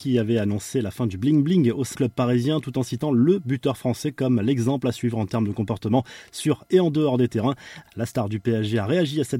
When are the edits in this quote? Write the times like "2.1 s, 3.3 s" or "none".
1.9 s